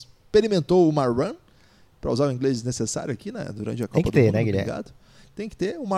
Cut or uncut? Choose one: uncut